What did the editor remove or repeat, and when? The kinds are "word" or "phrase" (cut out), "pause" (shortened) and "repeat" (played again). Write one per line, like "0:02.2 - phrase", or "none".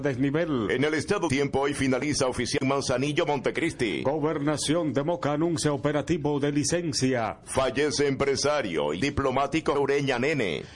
0:01.3 - word
0:02.6 - word
0:09.0 - word
0:09.7 - word